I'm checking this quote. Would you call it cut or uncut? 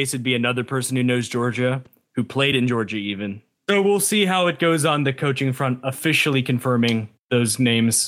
uncut